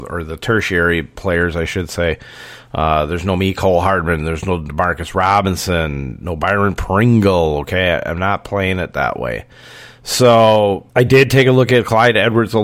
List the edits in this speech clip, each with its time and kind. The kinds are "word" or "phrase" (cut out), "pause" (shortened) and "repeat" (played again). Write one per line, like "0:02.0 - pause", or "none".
0:10.9 - pause